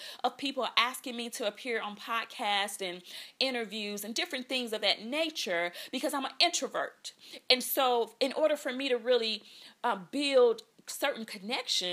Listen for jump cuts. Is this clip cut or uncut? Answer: uncut